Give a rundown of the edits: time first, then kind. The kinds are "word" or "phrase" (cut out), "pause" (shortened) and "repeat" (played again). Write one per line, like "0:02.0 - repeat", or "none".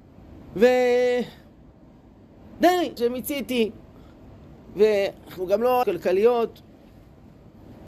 0:03.0 - word
0:05.8 - phrase